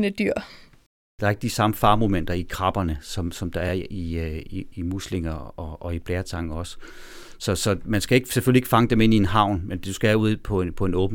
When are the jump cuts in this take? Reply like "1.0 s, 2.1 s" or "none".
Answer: none